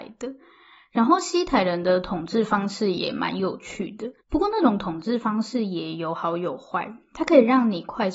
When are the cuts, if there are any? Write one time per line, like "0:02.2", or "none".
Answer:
0:04.2

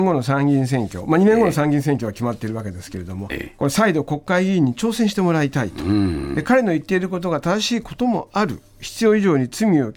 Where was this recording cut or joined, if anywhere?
0:03.3

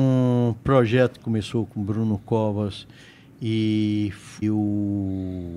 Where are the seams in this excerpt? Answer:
0:01.2
0:04.4

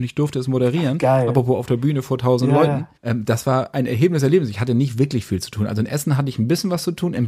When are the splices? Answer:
0:03.0

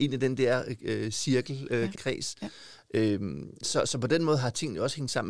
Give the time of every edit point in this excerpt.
0:01.9

